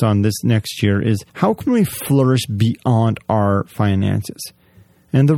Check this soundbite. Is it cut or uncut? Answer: cut